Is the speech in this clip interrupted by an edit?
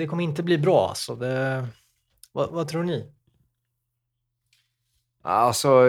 no; 0 cuts

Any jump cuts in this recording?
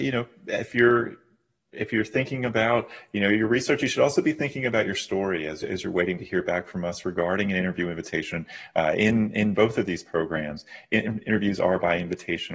no; 0 cuts

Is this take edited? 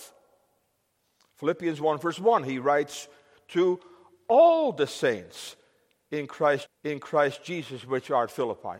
yes; 1 cut; at 6.7 s

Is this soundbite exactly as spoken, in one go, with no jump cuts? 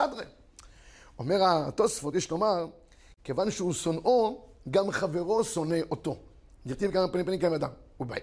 yes; 0 cuts

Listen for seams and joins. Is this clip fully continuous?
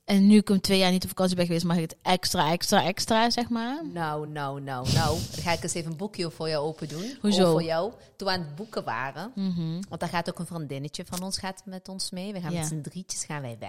yes; 0 cuts

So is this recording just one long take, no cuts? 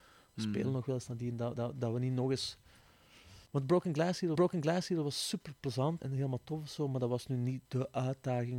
no; 5 cuts; at 1.6 s, 3.5 s, 4.3 s, 6.0 s, 7.7 s

